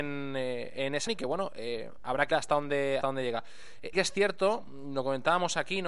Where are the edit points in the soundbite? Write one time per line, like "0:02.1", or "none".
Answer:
0:01.1
0:02.3
0:03.0
0:03.9